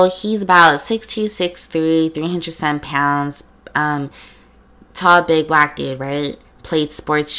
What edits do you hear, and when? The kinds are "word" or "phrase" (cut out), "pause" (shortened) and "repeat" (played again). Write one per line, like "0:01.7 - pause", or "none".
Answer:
none

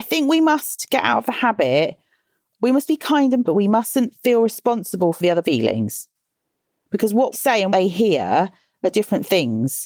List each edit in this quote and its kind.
0:02.5 - word
0:02.9 - word
0:03.4 - word
0:05.4 - word
0:07.3 - word
0:07.7 - word
0:08.9 - word

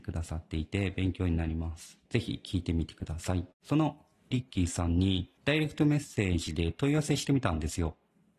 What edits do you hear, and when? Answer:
0:02.1 - pause
0:03.5 - pause
0:04.3 - word
0:05.4 - pause

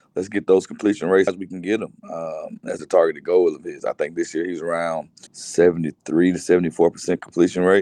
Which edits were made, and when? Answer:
0:01.3 - word
0:02.8 - word
0:05.3 - pause

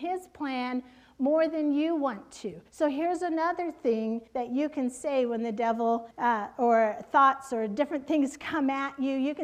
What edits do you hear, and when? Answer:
0:02.7 - pause
0:04.3 - pause
0:06.1 - pause

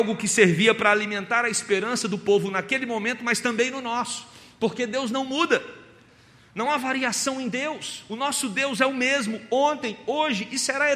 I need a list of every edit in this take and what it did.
none

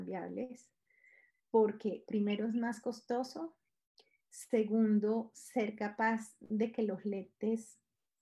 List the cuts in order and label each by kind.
none

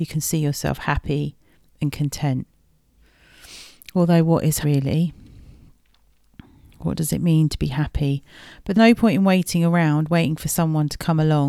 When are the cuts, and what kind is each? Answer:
0:04.6 - word
0:08.7 - word

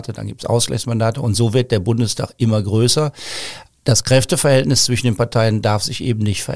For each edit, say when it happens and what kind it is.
none

